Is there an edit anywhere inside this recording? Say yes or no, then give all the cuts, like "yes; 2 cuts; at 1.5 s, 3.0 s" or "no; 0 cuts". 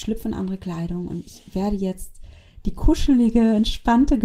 no; 0 cuts